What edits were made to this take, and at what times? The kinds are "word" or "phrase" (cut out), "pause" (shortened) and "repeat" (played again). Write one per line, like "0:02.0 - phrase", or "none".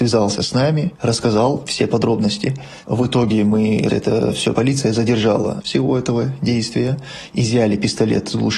0:03.9 - word
0:04.5 - phrase
0:05.6 - word